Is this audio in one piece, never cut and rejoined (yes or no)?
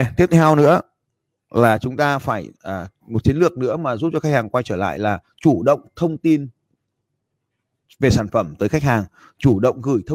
no